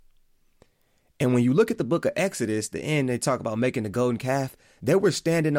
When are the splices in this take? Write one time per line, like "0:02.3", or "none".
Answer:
none